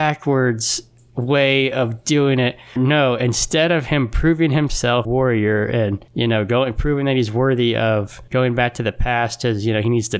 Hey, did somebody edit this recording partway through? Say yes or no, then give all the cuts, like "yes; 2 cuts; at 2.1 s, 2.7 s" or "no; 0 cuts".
yes; 4 cuts; at 2.8 s, 5.0 s, 6.1 s, 8.3 s